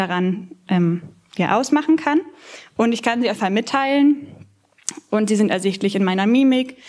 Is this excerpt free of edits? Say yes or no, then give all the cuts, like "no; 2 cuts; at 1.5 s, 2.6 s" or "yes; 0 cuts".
no; 1 cut; at 3.4 s